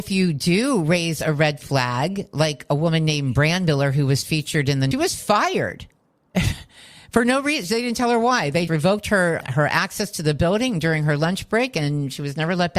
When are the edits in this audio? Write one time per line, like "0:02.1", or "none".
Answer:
0:04.9
0:08.7
0:09.4